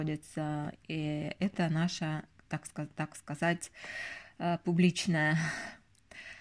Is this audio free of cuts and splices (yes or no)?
yes